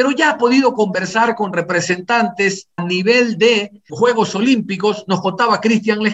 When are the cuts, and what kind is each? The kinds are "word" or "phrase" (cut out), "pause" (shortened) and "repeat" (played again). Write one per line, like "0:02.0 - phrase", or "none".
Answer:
0:02.8 - word
0:03.9 - word